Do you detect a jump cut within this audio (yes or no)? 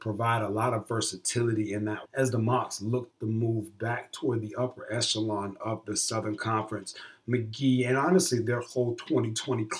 yes